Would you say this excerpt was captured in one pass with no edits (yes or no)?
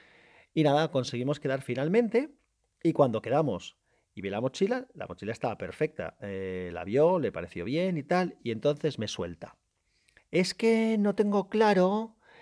yes